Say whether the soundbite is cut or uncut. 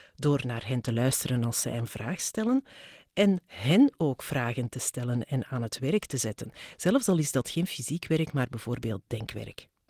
uncut